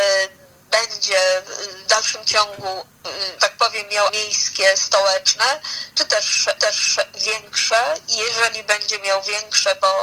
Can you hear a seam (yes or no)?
yes